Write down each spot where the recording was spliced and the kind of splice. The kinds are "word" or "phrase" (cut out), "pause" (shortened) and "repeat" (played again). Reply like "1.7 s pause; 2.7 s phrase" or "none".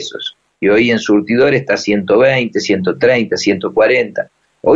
none